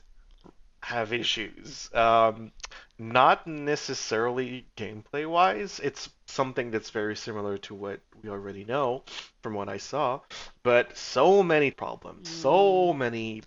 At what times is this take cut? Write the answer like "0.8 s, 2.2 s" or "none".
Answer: 11.7 s